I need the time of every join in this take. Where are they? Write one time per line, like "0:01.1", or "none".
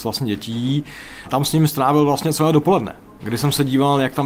none

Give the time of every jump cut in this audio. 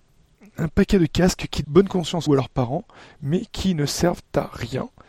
0:01.6
0:02.3

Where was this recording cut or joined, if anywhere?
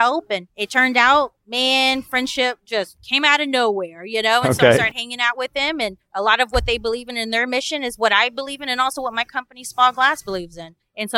0:01.4

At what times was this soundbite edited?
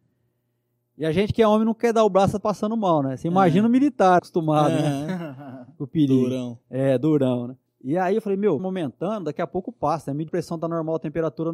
0:02.4
0:04.2
0:07.7
0:08.6
0:10.3

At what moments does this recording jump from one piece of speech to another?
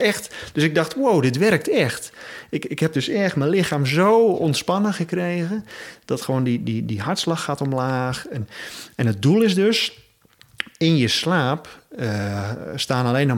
none

